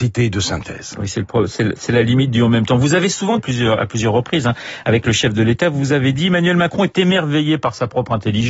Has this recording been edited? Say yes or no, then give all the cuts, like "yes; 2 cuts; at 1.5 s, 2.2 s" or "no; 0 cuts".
yes; 1 cut; at 3.4 s